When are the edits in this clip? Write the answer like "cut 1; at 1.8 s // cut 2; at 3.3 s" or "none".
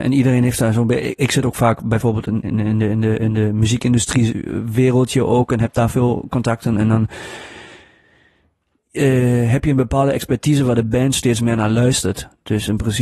none